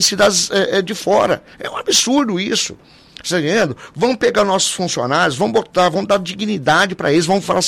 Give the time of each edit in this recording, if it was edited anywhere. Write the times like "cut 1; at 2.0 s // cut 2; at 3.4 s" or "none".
cut 1; at 1.5 s